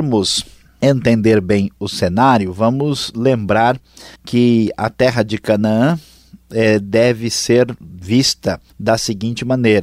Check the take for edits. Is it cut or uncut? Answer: cut